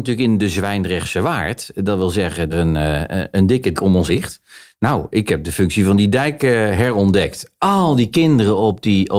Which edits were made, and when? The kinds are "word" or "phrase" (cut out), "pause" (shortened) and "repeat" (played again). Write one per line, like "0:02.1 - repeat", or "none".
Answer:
0:02.5 - phrase
0:03.7 - word
0:04.1 - word